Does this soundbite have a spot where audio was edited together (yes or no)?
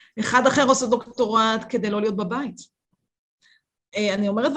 no